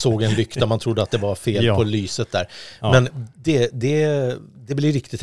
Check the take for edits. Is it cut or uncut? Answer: uncut